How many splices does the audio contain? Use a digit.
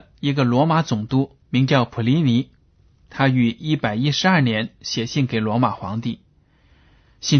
1